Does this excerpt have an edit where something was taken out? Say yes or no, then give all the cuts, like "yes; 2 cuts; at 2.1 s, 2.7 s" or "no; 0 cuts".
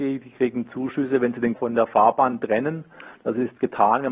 yes; 1 cut; at 1.5 s